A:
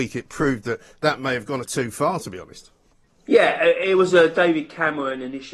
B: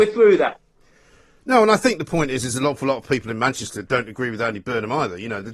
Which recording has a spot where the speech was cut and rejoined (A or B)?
A